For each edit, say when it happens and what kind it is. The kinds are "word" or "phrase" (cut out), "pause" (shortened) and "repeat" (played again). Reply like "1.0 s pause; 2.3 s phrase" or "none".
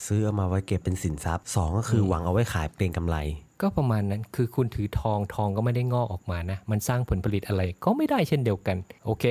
3.5 s pause